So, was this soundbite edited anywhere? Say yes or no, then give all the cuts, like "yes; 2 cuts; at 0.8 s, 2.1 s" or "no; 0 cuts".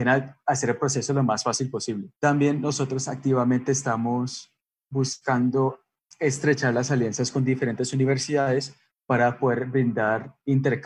yes; 2 cuts; at 2.2 s, 6.1 s